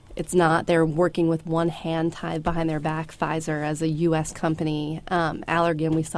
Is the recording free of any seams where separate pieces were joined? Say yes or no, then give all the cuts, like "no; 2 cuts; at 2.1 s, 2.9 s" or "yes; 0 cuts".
yes; 0 cuts